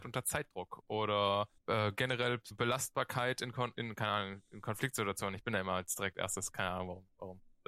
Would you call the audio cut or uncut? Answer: cut